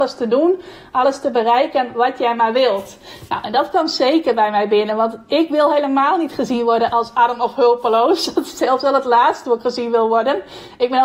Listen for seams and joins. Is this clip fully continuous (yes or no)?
yes